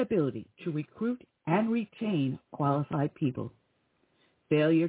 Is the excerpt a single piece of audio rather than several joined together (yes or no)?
yes